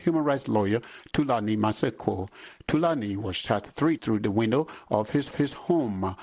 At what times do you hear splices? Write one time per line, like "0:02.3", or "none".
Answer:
0:04.0
0:05.3